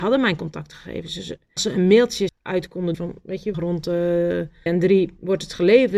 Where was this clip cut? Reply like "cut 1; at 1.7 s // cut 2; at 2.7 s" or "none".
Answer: cut 1; at 1.6 s // cut 2; at 2.3 s // cut 3; at 2.9 s // cut 4; at 3.5 s // cut 5; at 4.7 s